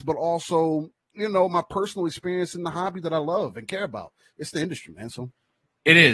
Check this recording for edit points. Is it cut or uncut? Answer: uncut